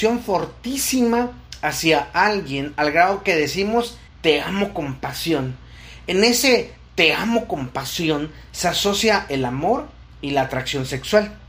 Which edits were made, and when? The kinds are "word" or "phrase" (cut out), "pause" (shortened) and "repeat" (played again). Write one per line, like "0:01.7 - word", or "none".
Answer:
0:04.1 - pause